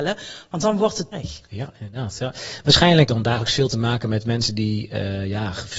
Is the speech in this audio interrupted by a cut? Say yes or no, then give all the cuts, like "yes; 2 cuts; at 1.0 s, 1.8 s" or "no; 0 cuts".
yes; 2 cuts; at 1.1 s, 3.1 s